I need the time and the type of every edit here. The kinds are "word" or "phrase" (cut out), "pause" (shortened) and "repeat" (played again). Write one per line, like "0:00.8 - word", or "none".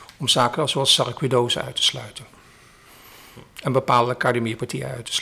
none